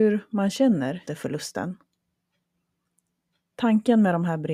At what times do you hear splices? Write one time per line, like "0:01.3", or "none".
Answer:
0:01.1